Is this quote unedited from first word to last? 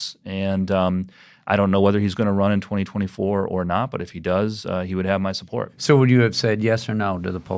yes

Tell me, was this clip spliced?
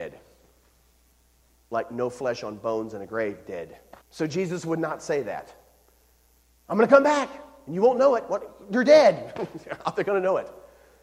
yes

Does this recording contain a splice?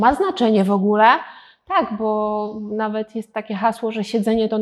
no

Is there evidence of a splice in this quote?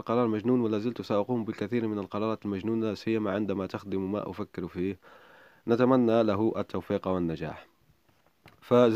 no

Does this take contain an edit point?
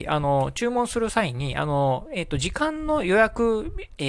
no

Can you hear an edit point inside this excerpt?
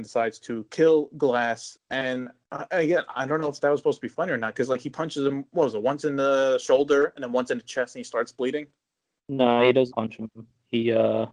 yes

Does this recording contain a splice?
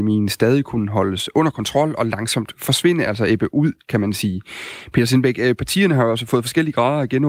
no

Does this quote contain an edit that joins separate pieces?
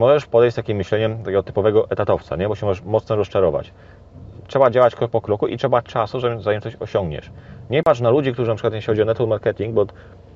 no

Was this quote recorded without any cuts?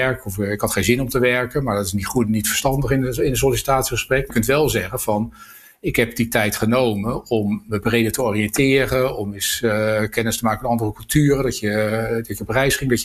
no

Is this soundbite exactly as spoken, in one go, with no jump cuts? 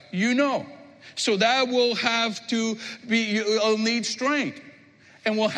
yes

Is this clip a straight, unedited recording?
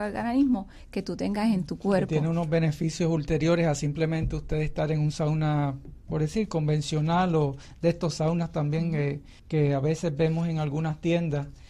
no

